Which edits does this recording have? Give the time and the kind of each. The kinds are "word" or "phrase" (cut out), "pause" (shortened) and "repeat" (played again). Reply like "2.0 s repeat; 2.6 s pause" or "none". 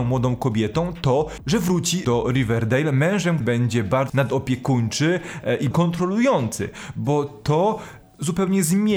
2.0 s phrase; 3.4 s word; 4.1 s word; 5.7 s word